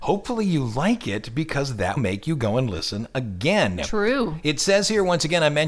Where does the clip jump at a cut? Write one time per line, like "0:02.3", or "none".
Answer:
0:02.0

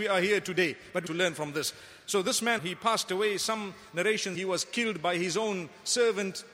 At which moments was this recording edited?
0:01.1
0:02.6
0:04.3

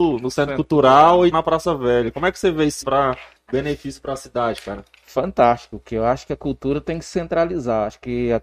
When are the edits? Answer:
0:01.3
0:02.8
0:03.4

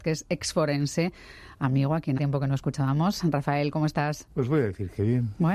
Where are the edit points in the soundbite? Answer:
0:02.2

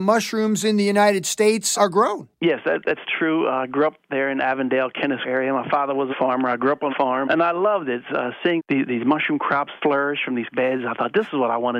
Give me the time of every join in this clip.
0:01.7
0:03.0
0:05.2
0:06.1
0:06.9
0:07.2
0:08.6
0:09.8
0:10.5

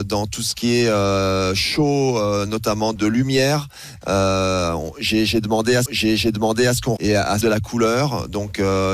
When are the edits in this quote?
0:03.0
0:05.9
0:07.0
0:07.4

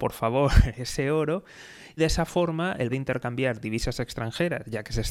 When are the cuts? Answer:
0:02.0
0:02.9

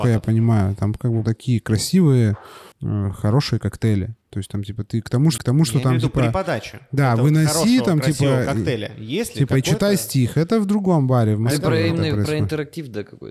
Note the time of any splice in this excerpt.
0:01.2
0:02.7
0:04.2
0:05.4

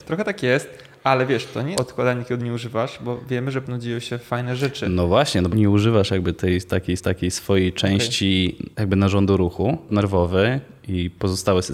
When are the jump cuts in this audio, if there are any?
0:01.7
0:03.6
0:05.5
0:07.0
0:08.7
0:09.9

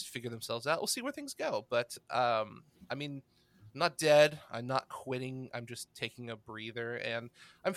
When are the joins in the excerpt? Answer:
none

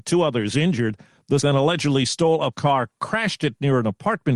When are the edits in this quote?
0:01.4
0:02.5

